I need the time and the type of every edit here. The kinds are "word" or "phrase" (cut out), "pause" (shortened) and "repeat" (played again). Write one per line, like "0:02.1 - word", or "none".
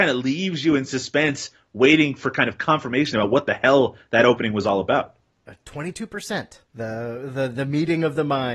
0:06.6 - pause